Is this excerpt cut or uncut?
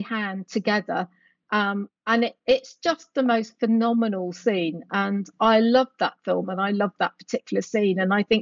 uncut